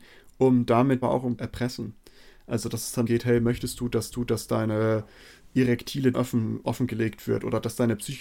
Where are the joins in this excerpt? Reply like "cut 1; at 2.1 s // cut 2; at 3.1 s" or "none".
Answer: cut 1; at 1.0 s // cut 2; at 1.4 s // cut 3; at 3.1 s // cut 4; at 4.1 s // cut 5; at 6.1 s

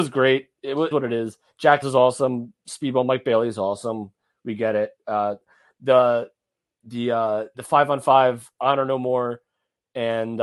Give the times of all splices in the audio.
cut 1; at 0.9 s // cut 2; at 1.8 s // cut 3; at 7.5 s

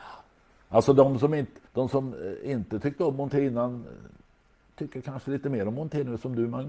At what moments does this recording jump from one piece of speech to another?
cut 1; at 1.7 s

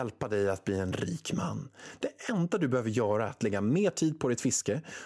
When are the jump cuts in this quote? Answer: none

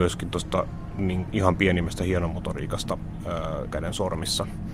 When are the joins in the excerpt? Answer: cut 1; at 1.3 s // cut 2; at 3.7 s

